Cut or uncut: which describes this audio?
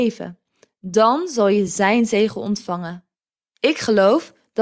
uncut